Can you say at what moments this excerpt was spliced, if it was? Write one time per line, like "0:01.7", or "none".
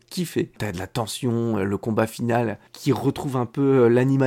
0:02.7